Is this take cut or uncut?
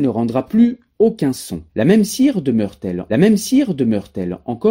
cut